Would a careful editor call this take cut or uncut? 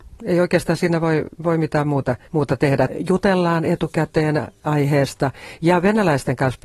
cut